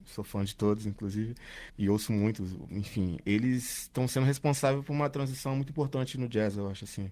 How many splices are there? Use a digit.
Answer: 1